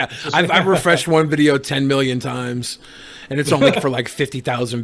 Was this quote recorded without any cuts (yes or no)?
no